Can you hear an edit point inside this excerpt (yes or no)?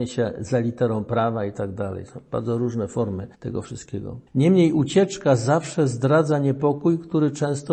yes